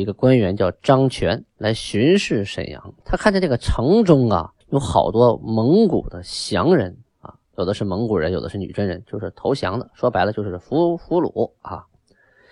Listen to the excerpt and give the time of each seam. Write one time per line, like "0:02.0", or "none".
0:03.0
0:04.6
0:07.4